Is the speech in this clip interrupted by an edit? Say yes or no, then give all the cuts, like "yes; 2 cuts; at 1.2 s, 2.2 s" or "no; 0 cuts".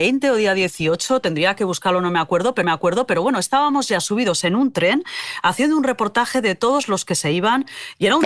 yes; 1 cut; at 2.6 s